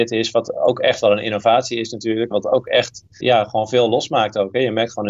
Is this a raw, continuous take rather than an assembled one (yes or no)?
no